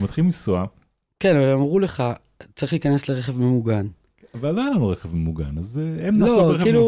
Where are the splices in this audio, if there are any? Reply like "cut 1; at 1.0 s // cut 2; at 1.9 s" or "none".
none